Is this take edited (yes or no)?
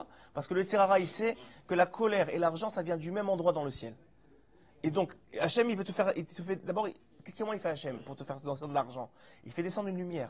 no